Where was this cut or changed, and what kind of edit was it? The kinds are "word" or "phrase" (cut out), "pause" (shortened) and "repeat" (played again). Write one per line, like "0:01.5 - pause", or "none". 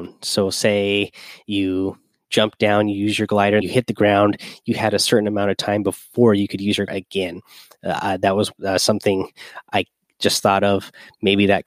0:03.6 - word
0:06.9 - word
0:08.6 - pause

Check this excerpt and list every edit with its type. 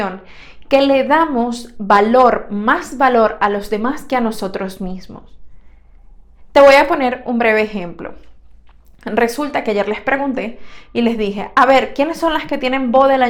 none

